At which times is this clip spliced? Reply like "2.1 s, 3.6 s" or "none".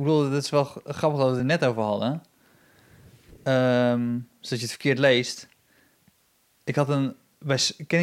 none